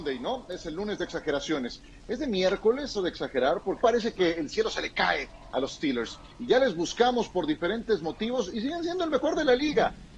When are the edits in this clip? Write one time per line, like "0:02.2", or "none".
0:02.9
0:03.8